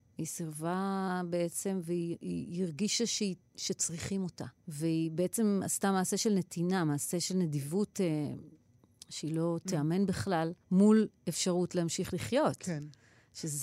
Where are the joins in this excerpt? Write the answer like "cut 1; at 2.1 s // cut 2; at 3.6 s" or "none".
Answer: cut 1; at 4.6 s // cut 2; at 10.6 s